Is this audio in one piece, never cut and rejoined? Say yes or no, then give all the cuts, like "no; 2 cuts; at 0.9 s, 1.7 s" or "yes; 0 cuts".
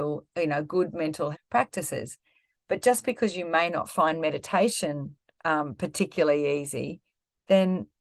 no; 2 cuts; at 1.3 s, 5.3 s